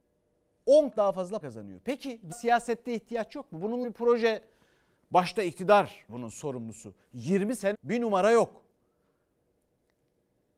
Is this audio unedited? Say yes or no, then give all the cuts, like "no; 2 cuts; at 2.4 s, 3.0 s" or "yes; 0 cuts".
no; 6 cuts; at 0.9 s, 1.4 s, 2.3 s, 3.8 s, 6.1 s, 7.7 s